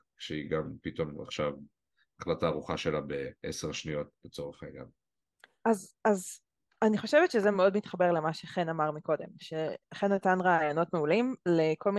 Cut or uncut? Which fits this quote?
uncut